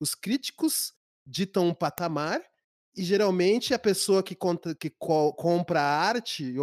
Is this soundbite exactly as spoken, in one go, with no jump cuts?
no; 1 cut; at 4.8 s

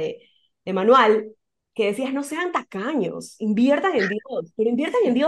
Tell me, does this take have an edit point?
no; 0 cuts

